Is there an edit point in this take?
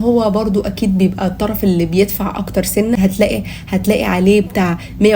no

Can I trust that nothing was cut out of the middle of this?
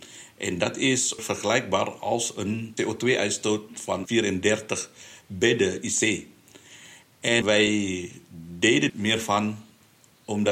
no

